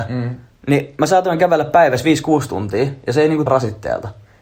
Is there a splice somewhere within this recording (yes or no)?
yes